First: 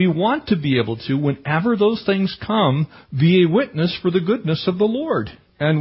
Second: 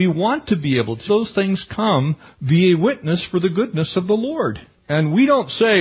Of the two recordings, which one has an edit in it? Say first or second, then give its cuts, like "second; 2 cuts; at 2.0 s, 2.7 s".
second; 1 cut; at 1.1 s